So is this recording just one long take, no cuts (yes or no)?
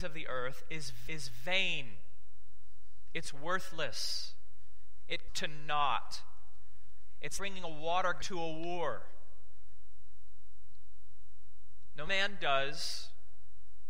no